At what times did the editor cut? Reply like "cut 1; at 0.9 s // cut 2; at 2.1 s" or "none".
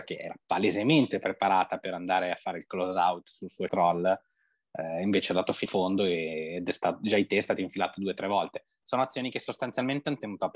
cut 1; at 3.7 s // cut 2; at 5.7 s